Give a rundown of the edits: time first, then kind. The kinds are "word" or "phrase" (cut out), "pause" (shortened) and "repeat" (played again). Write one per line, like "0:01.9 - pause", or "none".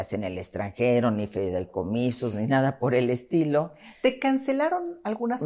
none